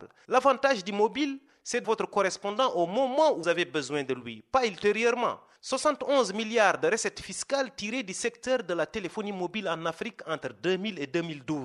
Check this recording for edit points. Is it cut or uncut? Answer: cut